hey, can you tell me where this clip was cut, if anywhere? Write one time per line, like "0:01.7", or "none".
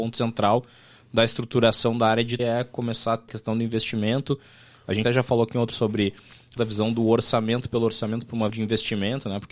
0:02.4
0:03.3
0:05.0
0:05.7
0:06.6
0:08.5